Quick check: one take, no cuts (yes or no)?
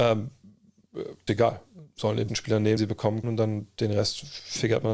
no